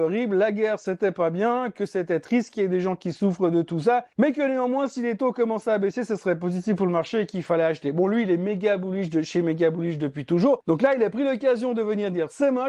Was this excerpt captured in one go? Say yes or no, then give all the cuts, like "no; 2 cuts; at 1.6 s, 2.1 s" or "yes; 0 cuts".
yes; 0 cuts